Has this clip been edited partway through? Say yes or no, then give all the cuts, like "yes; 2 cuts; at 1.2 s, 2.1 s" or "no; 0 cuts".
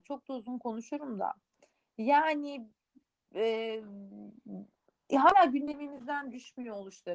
no; 0 cuts